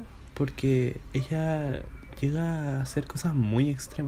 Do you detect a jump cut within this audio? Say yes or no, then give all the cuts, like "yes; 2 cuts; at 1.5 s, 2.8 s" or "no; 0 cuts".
no; 0 cuts